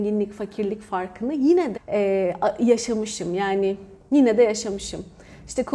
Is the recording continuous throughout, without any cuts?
no; 1 cut; at 1.7 s

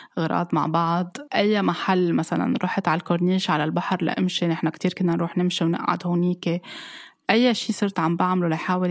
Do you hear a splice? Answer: no; 0 cuts

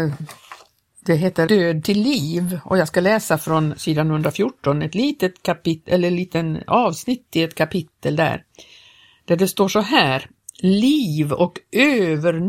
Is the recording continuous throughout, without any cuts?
no; 1 cut; at 1.5 s

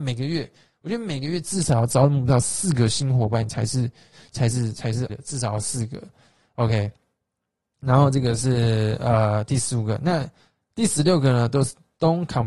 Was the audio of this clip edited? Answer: yes; 1 cut; at 5.1 s

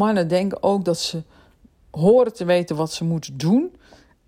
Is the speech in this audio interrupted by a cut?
no; 0 cuts

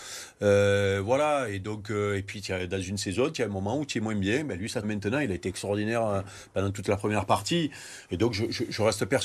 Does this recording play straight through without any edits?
no; 1 cut; at 4.8 s

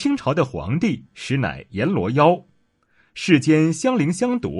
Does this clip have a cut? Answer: no; 0 cuts

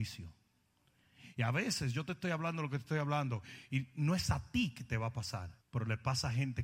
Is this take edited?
yes; 1 cut; at 5.6 s

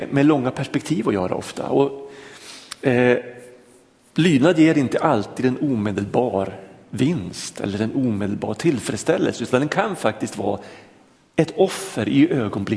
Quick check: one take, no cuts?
yes; 0 cuts

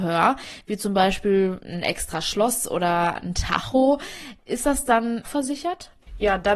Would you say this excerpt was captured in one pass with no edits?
no; 1 cut; at 5.2 s

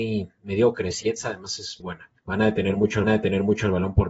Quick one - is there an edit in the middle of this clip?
yes; 4 cuts; at 1.0 s, 1.8 s, 2.2 s, 3.0 s

